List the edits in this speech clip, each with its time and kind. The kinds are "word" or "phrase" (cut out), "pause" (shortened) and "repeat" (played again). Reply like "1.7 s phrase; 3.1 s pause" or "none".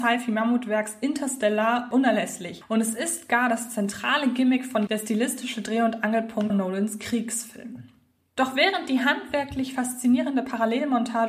4.9 s word; 6.5 s word